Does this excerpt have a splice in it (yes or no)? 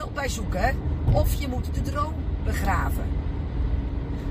no